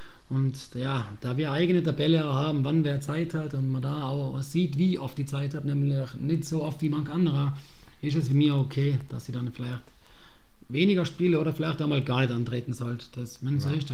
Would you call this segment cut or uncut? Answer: uncut